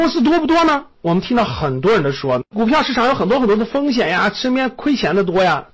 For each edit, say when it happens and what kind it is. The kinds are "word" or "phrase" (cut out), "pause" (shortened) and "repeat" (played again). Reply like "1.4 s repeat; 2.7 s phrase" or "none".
0.9 s pause